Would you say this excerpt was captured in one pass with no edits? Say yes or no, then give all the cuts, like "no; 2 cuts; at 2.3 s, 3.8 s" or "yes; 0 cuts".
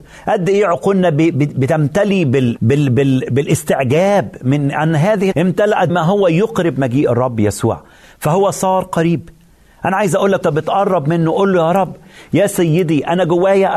no; 4 cuts; at 2.6 s, 5.3 s, 5.9 s, 10.4 s